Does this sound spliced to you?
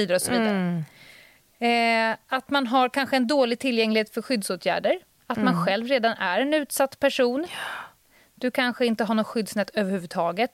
no; 0 cuts

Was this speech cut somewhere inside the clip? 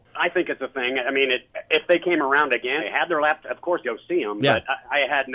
yes; 2 cuts; at 2.8 s, 3.8 s

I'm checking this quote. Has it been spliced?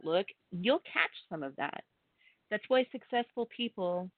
no; 0 cuts

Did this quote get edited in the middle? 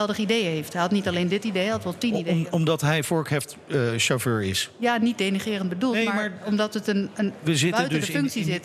no; 0 cuts

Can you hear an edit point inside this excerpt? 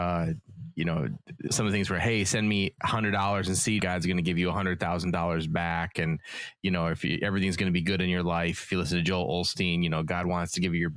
yes; 2 cuts; at 1.5 s, 3.8 s

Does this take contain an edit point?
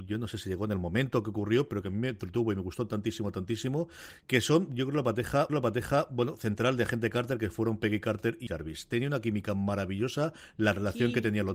yes; 3 cuts; at 2.9 s, 5.5 s, 8.5 s

